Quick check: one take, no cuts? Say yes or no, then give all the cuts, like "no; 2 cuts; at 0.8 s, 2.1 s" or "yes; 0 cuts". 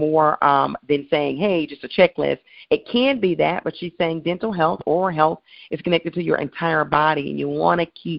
yes; 0 cuts